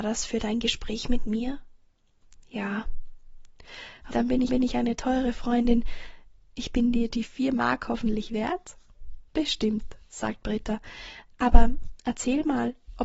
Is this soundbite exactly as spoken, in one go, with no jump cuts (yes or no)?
no